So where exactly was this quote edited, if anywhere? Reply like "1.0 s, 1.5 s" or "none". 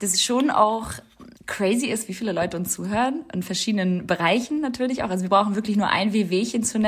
1.3 s

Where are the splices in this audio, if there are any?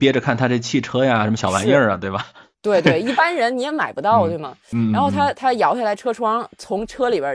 none

